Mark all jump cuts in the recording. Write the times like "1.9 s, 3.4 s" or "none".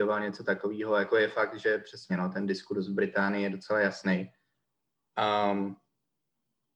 none